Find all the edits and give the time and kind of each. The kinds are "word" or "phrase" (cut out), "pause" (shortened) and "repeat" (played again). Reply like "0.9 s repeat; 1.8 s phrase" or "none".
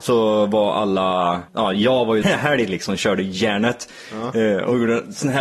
1.5 s pause; 2.2 s phrase